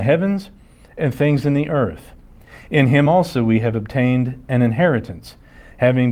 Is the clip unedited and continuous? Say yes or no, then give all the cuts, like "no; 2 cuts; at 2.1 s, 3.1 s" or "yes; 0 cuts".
yes; 0 cuts